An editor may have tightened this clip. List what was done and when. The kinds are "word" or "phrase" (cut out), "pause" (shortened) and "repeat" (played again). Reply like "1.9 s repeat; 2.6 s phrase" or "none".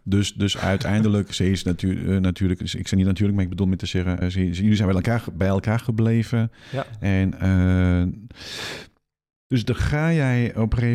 4.2 s word